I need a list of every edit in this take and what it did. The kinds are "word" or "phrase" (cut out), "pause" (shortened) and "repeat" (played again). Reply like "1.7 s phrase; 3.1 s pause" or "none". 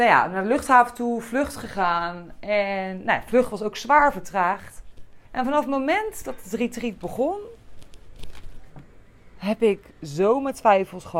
5.2 s pause